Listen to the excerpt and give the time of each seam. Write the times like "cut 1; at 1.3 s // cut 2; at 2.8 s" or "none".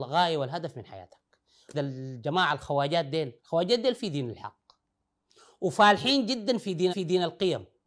cut 1; at 1.7 s // cut 2; at 3.4 s // cut 3; at 4.0 s // cut 4; at 6.9 s